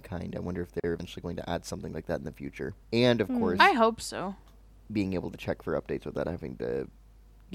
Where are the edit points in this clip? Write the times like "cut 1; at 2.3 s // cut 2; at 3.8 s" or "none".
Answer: cut 1; at 2.8 s